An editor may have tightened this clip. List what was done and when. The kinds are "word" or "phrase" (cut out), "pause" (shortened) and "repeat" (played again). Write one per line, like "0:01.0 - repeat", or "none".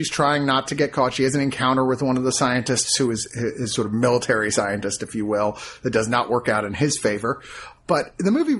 none